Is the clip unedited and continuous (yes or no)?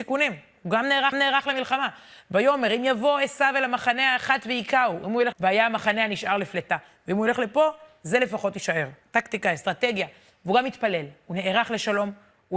no